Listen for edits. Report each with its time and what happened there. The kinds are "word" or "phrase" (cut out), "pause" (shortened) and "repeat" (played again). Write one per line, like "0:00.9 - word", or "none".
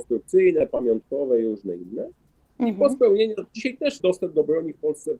0:03.5 - pause
0:04.0 - word